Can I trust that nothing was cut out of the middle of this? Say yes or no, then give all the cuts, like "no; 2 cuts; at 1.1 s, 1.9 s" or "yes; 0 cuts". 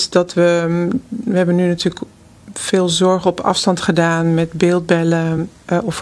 yes; 0 cuts